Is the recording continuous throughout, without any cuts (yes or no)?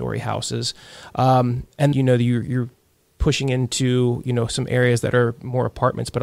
no